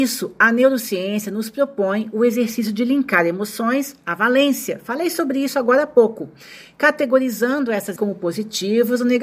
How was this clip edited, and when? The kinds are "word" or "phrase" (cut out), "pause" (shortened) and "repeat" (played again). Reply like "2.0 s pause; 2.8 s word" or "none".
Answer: 8.0 s word